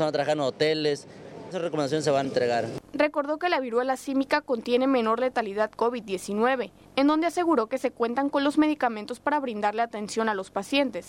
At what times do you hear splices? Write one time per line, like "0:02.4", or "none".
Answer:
0:01.5
0:02.2
0:05.8